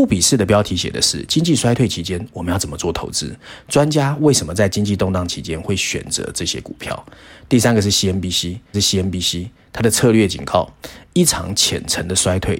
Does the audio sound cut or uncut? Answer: cut